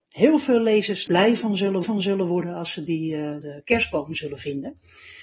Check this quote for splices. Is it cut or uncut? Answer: cut